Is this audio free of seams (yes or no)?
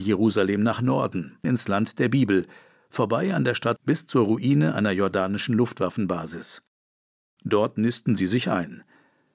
no